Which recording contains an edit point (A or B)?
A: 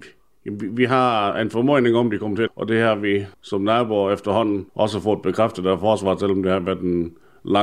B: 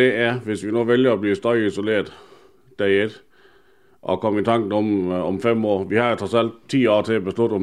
A